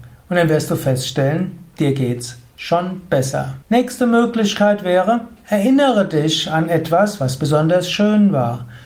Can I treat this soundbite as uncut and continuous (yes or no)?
no